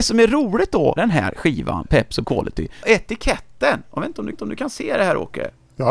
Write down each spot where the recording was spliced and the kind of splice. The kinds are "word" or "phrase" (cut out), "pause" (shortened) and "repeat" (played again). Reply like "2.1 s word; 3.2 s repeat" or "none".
1.0 s word; 2.2 s word; 2.8 s word; 4.3 s repeat